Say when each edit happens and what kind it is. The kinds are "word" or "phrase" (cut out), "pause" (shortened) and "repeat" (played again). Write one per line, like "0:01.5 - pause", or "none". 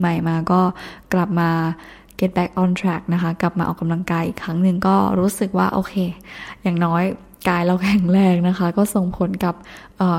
none